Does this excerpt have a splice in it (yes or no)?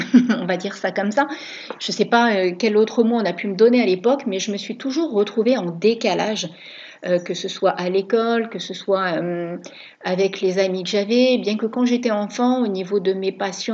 no